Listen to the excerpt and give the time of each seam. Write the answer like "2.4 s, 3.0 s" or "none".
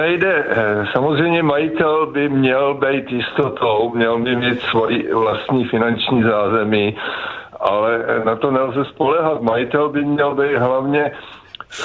none